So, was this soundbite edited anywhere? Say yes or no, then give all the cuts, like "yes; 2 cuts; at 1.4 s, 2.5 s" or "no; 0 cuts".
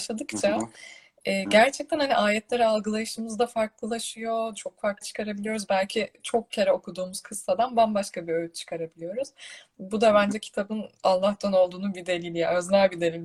yes; 1 cut; at 5.0 s